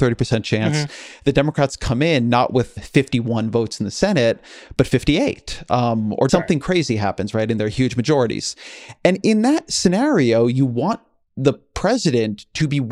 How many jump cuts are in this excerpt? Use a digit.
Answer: 2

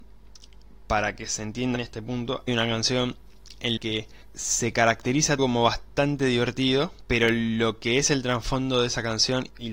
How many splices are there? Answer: 4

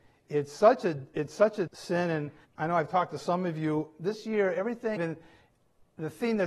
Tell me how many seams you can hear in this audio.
3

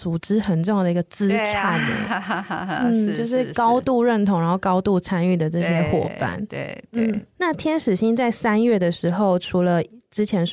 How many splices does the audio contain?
0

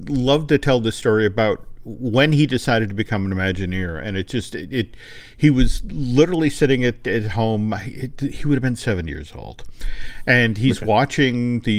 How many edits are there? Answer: 0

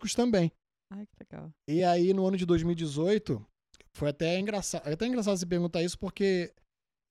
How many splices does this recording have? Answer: 0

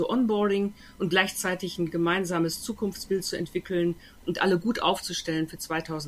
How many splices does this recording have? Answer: 0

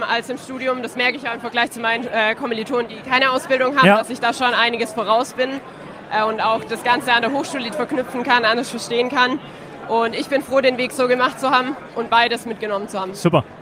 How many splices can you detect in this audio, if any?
1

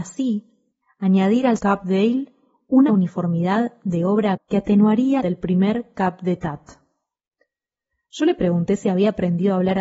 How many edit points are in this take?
4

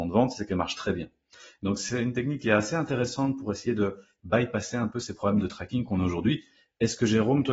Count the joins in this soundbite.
0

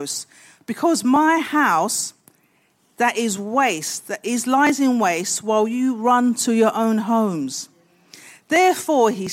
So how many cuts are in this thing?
0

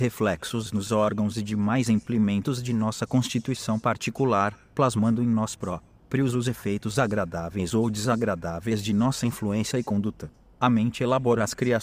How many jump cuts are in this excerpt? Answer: 0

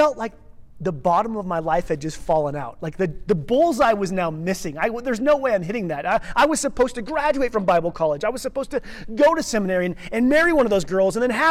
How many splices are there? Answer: 0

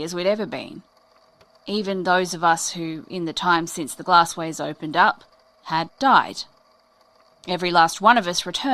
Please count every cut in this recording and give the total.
0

